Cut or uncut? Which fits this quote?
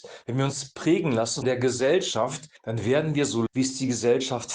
cut